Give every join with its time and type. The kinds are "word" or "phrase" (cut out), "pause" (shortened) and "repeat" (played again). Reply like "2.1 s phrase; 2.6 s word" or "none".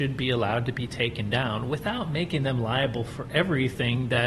none